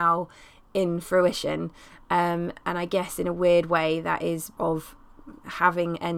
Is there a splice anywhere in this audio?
yes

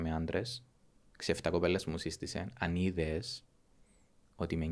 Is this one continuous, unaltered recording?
yes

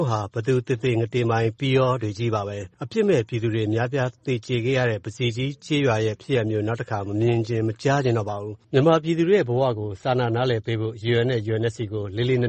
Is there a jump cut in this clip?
yes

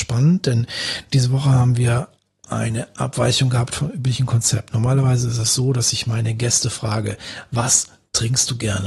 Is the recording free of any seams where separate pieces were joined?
yes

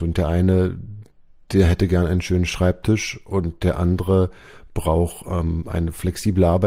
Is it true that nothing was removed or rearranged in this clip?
yes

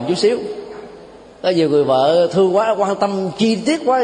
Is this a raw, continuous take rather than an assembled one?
yes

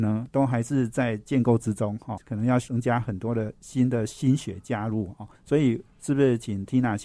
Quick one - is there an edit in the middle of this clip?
yes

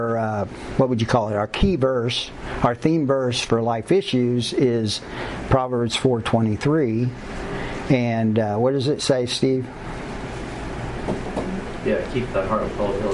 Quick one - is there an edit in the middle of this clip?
no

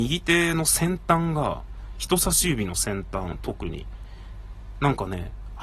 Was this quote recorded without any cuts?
yes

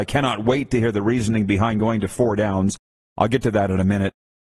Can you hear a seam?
no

